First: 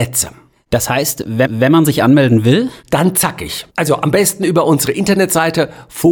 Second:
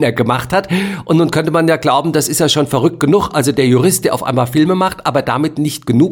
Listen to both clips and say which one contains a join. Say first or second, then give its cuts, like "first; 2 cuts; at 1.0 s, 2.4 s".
first; 2 cuts; at 1.5 s, 3.7 s